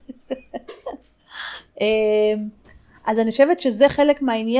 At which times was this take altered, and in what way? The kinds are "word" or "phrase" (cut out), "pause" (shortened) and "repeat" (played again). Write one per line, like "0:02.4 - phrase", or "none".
none